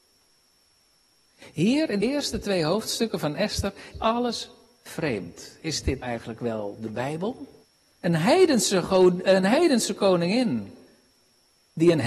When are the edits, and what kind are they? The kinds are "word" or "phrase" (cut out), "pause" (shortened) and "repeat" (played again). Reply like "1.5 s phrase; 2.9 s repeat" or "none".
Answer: 2.0 s word; 3.9 s word; 6.0 s word; 7.6 s pause